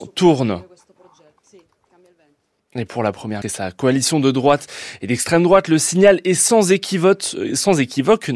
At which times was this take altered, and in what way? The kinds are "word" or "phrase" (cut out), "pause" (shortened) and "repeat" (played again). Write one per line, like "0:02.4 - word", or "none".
0:03.4 - word

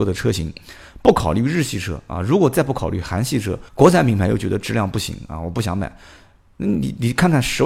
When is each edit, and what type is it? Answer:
0:03.7 - pause

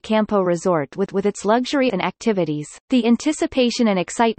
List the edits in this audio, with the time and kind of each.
0:01.1 - repeat
0:01.9 - word
0:02.8 - pause

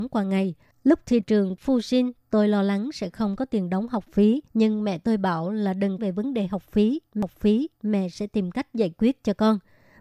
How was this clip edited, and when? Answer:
0:01.2 - word
0:04.5 - pause
0:06.0 - phrase

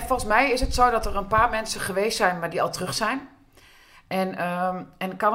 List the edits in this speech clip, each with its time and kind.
none

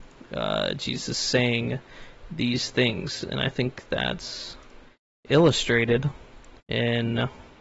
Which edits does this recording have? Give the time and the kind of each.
0:06.6 - pause

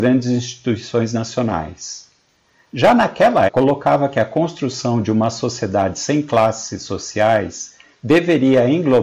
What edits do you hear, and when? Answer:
0:03.5 - word

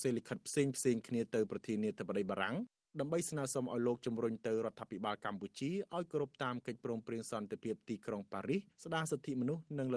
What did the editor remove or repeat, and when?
0:08.7 - pause

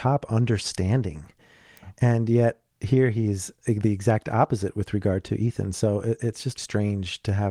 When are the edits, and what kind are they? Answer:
0:06.6 - word

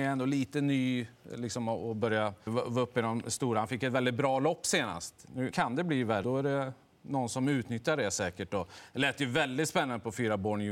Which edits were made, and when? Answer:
0:02.5 - word
0:05.5 - word
0:06.2 - word

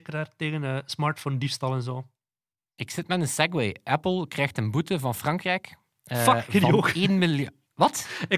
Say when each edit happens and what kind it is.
none

